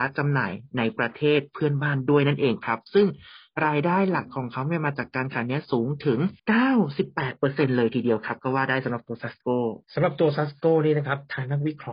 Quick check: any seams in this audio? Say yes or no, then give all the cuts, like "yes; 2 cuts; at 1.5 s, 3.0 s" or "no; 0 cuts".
yes; 2 cuts; at 6.4 s, 9.8 s